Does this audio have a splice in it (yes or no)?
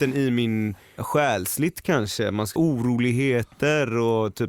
yes